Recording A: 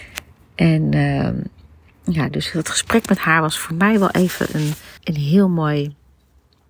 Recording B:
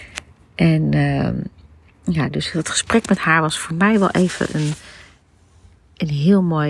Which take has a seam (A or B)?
A